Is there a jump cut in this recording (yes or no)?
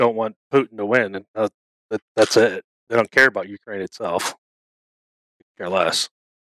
no